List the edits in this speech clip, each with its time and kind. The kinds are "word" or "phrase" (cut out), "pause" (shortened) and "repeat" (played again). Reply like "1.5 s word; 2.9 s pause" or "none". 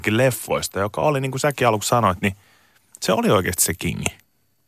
none

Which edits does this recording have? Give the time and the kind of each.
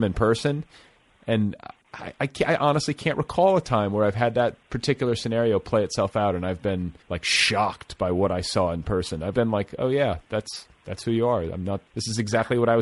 7.0 s pause; 9.3 s word; 11.9 s pause

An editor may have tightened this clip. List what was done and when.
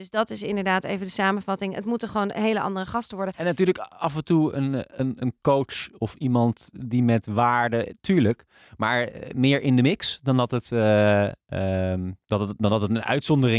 12.2 s pause

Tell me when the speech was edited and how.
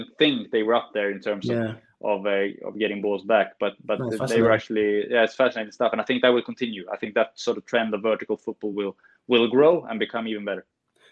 none

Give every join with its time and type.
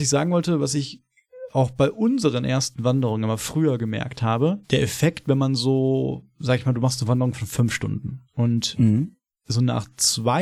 4.6 s pause; 8.2 s pause

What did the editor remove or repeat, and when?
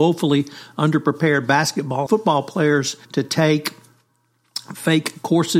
2.1 s word; 3.0 s pause

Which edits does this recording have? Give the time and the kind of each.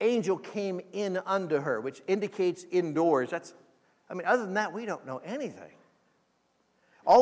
none

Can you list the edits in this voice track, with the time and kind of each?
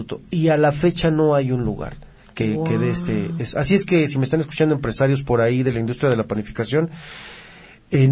none

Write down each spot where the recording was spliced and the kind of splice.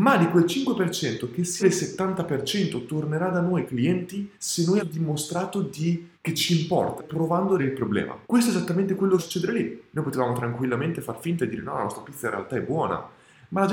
1.6 s phrase; 3.7 s word; 4.3 s pause; 4.8 s phrase; 6.1 s pause; 7.0 s phrase; 7.6 s word; 8.2 s pause; 9.2 s phrase

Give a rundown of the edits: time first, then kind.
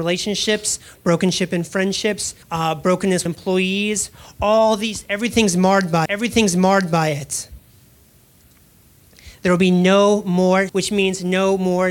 2.4 s pause; 3.3 s phrase; 6.1 s repeat; 10.7 s word

